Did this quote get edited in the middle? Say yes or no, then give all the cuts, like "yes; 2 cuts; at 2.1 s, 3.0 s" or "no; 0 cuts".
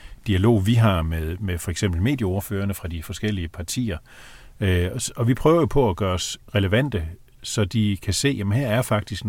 no; 0 cuts